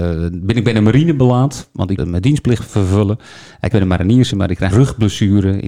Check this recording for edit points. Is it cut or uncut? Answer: cut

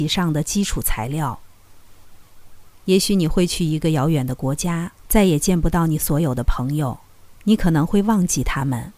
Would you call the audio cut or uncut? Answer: cut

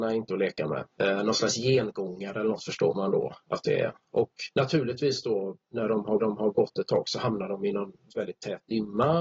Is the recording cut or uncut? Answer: cut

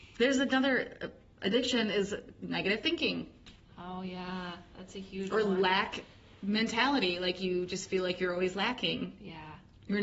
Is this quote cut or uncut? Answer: uncut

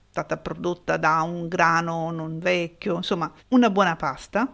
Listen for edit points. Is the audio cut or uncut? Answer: cut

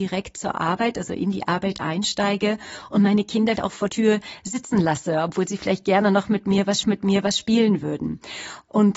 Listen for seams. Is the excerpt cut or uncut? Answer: cut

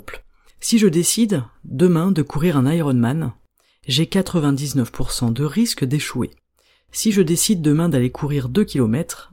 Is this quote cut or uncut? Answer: uncut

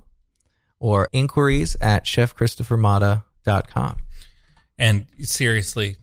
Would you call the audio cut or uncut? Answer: cut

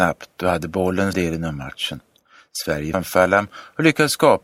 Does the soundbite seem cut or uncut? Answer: cut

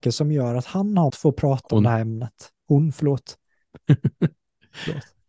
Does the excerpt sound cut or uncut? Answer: cut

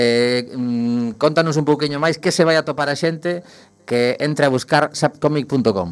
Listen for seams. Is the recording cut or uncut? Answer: uncut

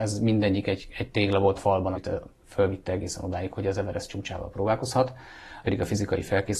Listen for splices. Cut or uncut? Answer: cut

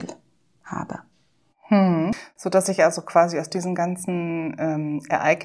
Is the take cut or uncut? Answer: uncut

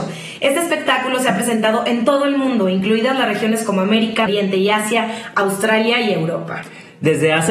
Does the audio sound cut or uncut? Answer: cut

